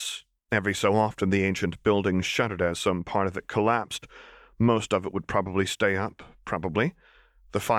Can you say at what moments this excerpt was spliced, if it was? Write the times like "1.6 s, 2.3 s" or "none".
none